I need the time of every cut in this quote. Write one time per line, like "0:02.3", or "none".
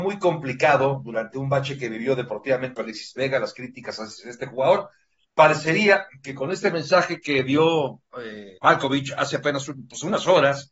0:02.8
0:08.6